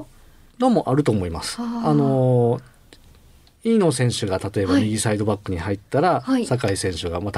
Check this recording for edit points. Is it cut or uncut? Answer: uncut